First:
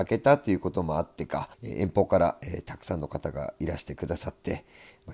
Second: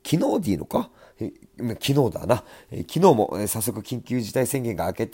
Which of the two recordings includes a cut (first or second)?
first